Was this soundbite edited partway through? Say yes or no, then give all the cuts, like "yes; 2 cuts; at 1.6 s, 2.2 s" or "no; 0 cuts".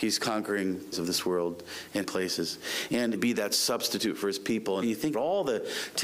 yes; 5 cuts; at 0.9 s, 2.0 s, 3.1 s, 4.8 s, 5.1 s